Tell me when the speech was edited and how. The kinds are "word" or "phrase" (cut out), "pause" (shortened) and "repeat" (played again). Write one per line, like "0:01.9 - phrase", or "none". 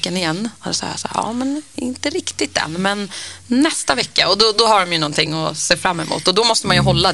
none